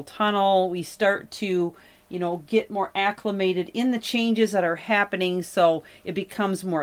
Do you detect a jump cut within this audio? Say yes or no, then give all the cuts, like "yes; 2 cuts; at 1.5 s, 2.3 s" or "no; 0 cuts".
no; 0 cuts